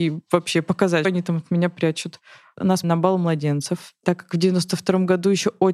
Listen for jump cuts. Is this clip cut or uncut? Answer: cut